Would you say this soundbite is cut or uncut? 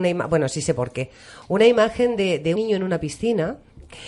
cut